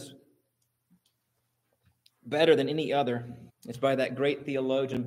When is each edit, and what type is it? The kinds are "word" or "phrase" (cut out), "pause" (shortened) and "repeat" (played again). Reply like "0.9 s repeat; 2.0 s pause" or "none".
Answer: 3.5 s pause